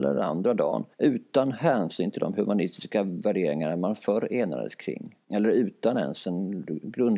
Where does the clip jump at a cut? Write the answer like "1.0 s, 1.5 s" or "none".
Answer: 0.9 s, 5.2 s